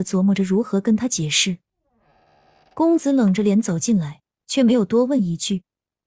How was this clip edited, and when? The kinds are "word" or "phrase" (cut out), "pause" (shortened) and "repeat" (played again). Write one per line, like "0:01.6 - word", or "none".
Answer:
none